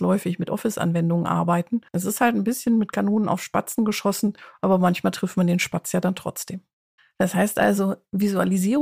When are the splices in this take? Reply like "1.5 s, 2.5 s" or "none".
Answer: 1.9 s, 7.0 s